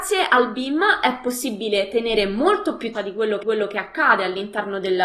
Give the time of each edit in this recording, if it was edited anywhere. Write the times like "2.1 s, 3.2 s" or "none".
2.9 s, 3.4 s